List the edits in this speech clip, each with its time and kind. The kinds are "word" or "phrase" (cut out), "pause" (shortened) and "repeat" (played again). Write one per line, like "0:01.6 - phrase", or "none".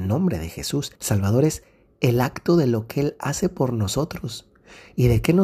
0:00.9 - pause